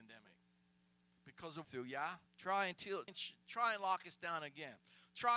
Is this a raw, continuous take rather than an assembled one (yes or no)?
no